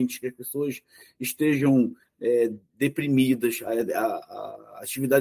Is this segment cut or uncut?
uncut